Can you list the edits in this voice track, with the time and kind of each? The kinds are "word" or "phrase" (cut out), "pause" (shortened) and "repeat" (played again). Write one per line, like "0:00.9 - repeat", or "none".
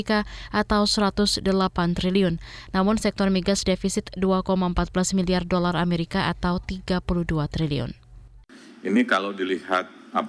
none